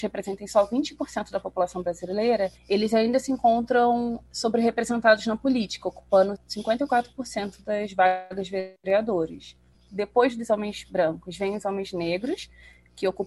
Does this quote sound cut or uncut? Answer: cut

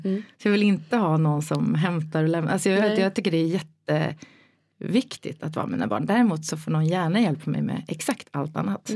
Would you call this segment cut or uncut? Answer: uncut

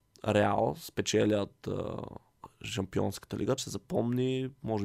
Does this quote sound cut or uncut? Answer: cut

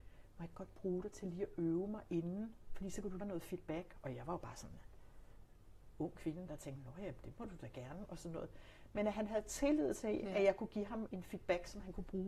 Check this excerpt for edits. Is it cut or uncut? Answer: cut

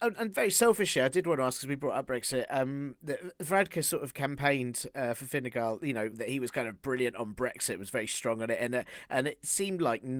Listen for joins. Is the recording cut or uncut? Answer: cut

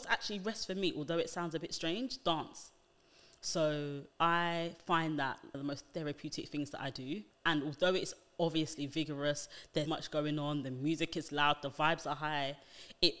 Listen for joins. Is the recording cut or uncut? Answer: cut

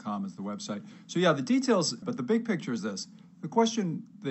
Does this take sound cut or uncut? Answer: cut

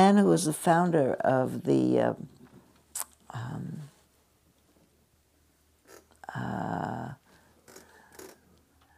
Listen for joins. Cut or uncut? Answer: uncut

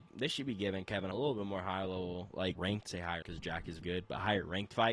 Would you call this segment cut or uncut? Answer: cut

